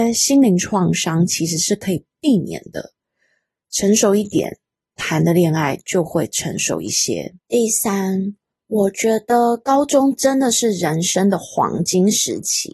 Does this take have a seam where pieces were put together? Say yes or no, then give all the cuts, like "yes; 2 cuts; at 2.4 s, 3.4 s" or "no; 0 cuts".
yes; 1 cut; at 7.4 s